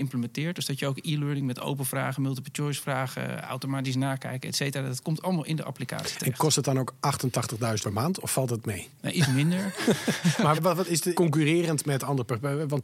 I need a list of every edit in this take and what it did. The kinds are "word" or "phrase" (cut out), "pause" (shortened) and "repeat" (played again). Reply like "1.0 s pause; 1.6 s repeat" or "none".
7.8 s word; 10.5 s word; 11.1 s phrase

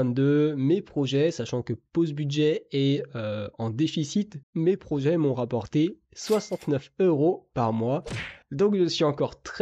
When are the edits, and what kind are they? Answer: 4.4 s pause; 8.4 s pause

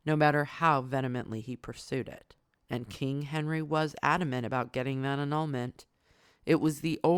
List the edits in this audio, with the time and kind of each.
2.6 s pause

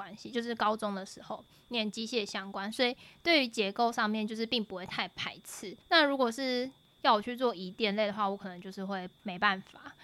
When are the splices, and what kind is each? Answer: 5.8 s pause

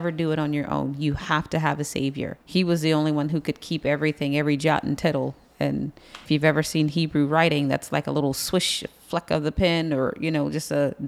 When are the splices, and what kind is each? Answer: 2.4 s pause; 6.3 s word

